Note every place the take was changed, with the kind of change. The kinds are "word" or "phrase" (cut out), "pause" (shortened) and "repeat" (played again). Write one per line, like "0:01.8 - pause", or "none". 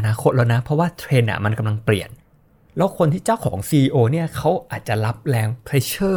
none